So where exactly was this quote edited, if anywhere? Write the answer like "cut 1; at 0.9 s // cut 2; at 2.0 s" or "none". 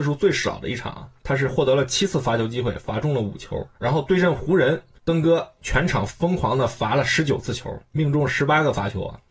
cut 1; at 3.7 s